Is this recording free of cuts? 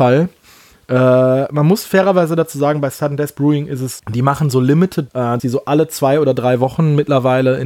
no; 3 cuts; at 4.0 s, 5.1 s, 5.4 s

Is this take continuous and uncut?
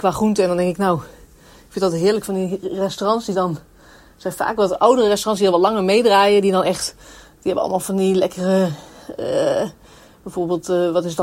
yes; 0 cuts

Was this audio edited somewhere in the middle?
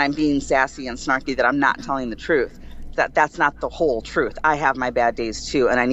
yes; 1 cut; at 2.9 s

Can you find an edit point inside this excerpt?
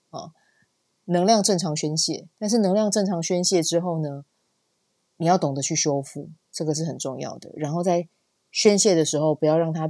yes; 2 cuts; at 2.3 s, 4.9 s

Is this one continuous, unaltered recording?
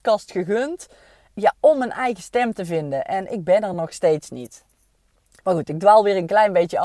yes; 0 cuts

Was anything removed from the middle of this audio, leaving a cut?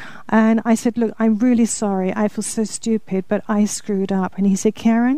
no; 0 cuts

